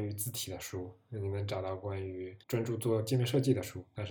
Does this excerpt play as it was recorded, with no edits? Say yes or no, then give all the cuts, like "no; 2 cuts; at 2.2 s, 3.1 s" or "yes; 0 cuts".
no; 1 cut; at 2.4 s